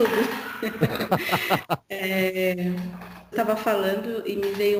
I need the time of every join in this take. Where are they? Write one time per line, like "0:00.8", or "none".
0:03.3